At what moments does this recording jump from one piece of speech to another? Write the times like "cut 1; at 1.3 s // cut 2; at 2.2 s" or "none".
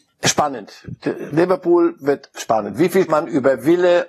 cut 1; at 3.1 s

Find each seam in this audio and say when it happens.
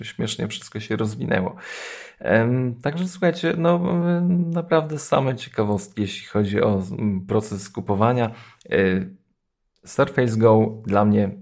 none

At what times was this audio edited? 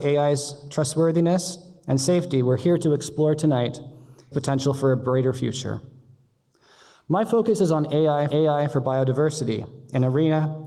cut 1; at 4.3 s // cut 2; at 8.3 s

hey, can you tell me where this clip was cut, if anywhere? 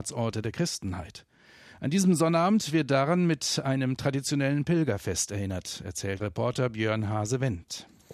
cut 1; at 6.2 s

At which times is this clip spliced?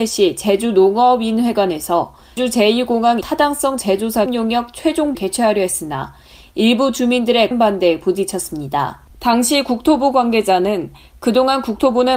cut 1; at 2.4 s // cut 2; at 3.2 s // cut 3; at 4.3 s // cut 4; at 5.1 s // cut 5; at 7.5 s // cut 6; at 9.1 s

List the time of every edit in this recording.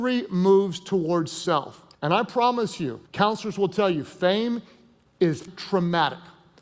cut 1; at 1.9 s // cut 2; at 3.1 s // cut 3; at 5.5 s

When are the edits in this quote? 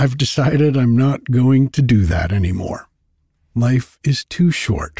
none

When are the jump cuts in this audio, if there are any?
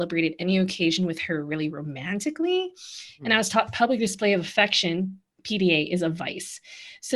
none

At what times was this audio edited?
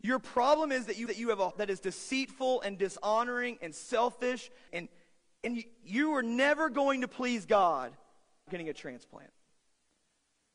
cut 1; at 1.1 s // cut 2; at 1.5 s // cut 3; at 4.7 s // cut 4; at 8.5 s

